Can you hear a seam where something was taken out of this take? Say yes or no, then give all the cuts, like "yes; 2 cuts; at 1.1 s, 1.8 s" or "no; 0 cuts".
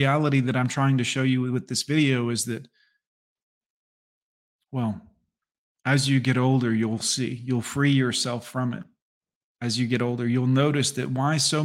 no; 0 cuts